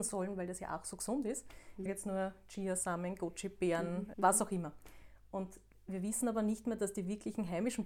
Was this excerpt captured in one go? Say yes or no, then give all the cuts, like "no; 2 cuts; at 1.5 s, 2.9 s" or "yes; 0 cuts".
no; 2 cuts; at 1.9 s, 4.1 s